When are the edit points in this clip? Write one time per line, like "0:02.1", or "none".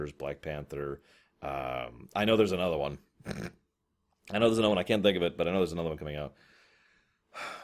none